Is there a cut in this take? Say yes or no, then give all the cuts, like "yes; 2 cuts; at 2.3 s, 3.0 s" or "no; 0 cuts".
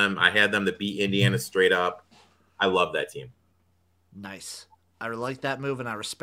no; 0 cuts